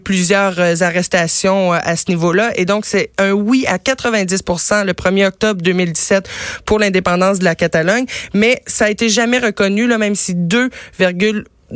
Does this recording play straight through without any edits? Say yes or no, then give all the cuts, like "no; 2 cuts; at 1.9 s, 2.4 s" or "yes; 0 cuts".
yes; 0 cuts